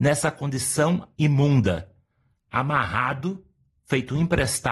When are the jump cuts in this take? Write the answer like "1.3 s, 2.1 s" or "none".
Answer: 1.1 s